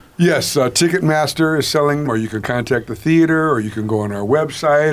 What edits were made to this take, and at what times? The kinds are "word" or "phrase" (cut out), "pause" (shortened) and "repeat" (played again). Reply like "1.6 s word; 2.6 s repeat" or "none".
2.0 s word